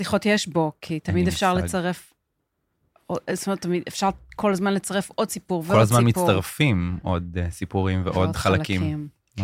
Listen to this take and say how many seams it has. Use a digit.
0